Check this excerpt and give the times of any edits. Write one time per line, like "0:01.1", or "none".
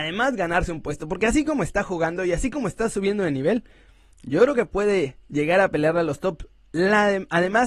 none